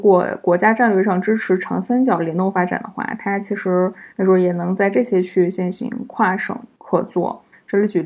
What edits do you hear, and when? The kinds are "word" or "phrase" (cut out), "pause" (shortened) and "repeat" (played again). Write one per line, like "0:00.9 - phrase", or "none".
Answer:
0:04.1 - pause

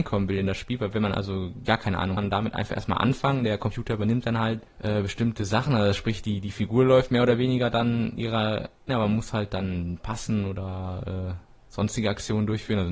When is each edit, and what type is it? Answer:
0:01.7 - word
0:02.2 - phrase
0:08.9 - phrase

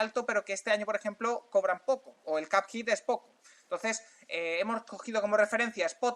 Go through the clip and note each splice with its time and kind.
none

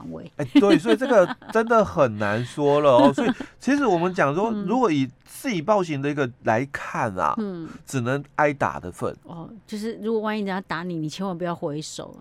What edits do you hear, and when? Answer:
0:05.2 - pause
0:06.4 - pause
0:09.2 - pause

